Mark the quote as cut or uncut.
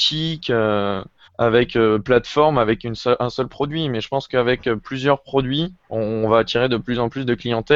cut